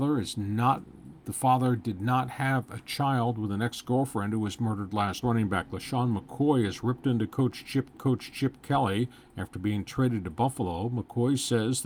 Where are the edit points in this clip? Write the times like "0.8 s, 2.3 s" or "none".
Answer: 1.2 s, 5.2 s, 7.9 s